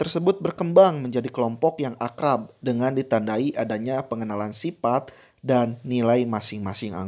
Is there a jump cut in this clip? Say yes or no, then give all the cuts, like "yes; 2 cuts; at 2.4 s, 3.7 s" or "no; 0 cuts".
no; 0 cuts